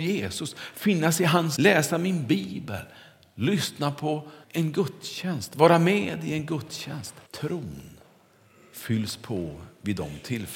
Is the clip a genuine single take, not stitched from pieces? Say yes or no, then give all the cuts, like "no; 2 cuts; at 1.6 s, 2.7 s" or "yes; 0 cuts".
no; 3 cuts; at 1.6 s, 4.4 s, 7.3 s